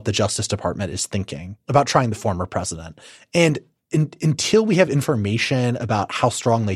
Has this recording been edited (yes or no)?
no